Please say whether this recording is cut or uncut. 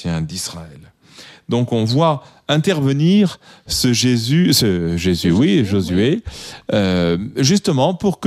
uncut